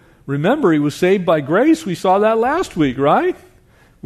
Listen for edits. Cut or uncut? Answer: uncut